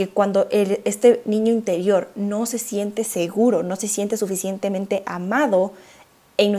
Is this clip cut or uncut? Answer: uncut